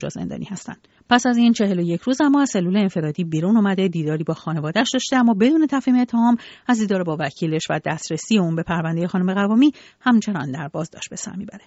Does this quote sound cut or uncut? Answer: uncut